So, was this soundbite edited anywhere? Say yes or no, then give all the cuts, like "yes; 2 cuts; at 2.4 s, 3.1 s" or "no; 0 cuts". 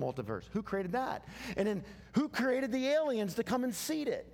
no; 0 cuts